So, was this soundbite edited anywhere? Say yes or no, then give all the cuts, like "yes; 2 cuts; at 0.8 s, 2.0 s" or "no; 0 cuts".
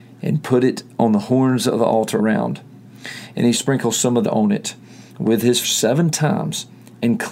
yes; 4 cuts; at 2.2 s, 3.5 s, 4.2 s, 5.6 s